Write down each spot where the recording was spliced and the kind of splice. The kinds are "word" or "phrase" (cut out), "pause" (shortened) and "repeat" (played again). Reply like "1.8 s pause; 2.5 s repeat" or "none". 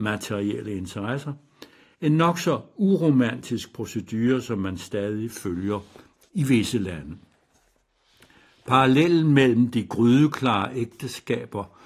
none